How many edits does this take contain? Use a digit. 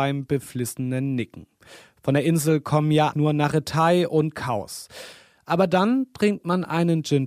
1